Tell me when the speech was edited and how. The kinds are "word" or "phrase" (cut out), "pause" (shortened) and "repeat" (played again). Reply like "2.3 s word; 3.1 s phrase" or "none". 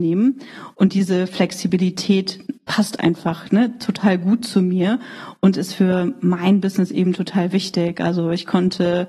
none